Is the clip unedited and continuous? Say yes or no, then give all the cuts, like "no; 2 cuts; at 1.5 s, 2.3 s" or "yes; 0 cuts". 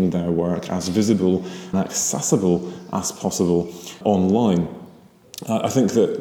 no; 2 cuts; at 1.7 s, 4.0 s